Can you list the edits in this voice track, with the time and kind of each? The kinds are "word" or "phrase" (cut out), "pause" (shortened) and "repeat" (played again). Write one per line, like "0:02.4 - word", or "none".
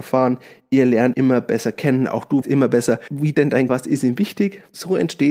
0:01.1 - word
0:02.4 - word
0:03.3 - word
0:03.7 - word